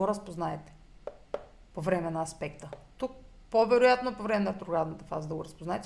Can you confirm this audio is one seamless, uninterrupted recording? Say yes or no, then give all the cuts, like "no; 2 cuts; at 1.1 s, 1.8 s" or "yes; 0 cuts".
yes; 0 cuts